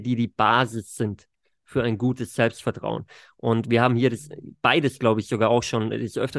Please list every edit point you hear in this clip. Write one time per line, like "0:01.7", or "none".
none